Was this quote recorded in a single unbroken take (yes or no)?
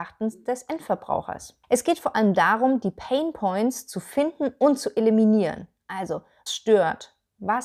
no